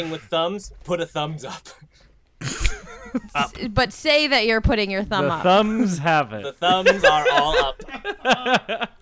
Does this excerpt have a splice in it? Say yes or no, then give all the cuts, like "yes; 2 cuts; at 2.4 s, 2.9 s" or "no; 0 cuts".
no; 0 cuts